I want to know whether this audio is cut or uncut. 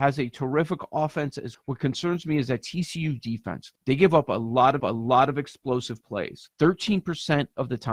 cut